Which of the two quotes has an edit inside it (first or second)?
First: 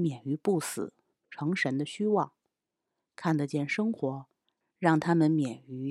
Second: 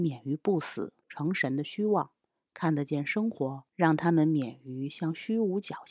second